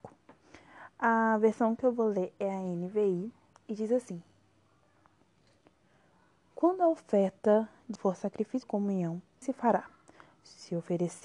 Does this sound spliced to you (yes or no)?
yes